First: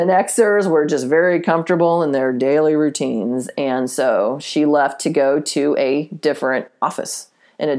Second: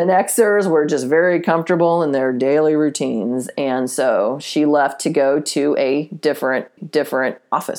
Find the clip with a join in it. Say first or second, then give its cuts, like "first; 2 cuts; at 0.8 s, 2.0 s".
second; 1 cut; at 6.8 s